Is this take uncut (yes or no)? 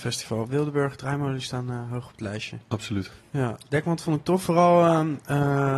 yes